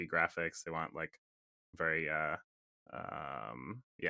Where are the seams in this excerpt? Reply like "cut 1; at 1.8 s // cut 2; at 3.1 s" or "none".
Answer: none